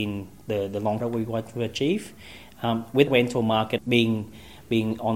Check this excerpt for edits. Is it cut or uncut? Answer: cut